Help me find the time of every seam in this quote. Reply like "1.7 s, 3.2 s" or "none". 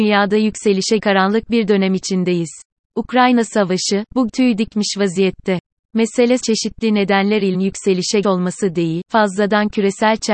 1.0 s, 2.8 s, 4.3 s, 6.4 s, 7.5 s, 8.2 s